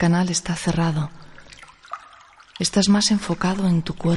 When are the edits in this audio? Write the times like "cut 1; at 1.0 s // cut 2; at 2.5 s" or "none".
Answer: none